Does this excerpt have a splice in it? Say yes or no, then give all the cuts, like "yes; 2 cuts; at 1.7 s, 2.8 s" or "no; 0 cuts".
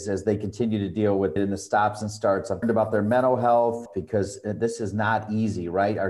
yes; 2 cuts; at 1.4 s, 2.6 s